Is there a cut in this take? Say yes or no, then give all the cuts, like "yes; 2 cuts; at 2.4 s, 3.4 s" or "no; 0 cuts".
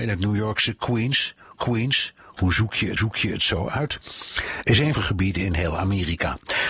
yes; 3 cuts; at 1.5 s, 3.0 s, 4.9 s